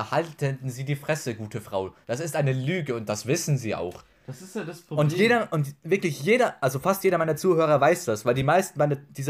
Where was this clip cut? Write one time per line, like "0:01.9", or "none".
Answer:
none